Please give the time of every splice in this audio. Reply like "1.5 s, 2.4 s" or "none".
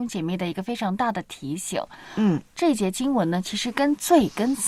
2.5 s